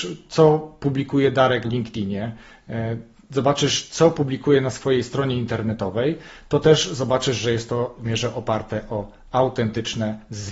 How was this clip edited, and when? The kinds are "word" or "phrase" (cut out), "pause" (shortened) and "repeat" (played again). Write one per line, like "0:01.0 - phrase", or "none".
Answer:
0:01.6 - word
0:08.0 - word